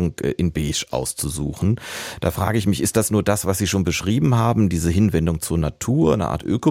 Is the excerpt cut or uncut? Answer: uncut